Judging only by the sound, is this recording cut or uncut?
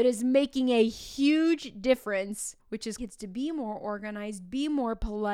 cut